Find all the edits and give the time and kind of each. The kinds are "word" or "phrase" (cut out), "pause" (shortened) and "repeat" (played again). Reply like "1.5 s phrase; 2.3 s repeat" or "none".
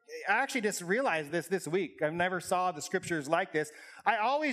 none